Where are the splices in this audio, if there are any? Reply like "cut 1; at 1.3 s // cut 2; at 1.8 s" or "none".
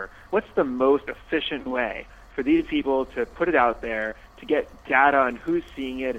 none